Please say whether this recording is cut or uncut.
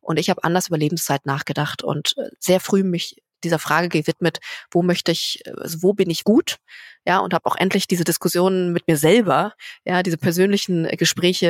cut